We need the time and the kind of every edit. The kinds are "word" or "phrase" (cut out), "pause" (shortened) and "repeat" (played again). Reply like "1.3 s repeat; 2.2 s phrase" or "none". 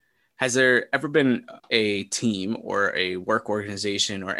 1.6 s pause